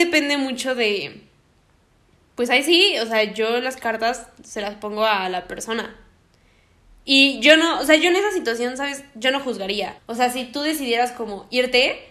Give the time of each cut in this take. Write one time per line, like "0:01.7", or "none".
0:10.0